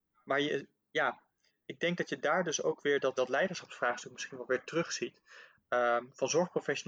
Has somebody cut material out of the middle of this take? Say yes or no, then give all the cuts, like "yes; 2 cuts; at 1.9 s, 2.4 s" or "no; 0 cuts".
yes; 1 cut; at 3.2 s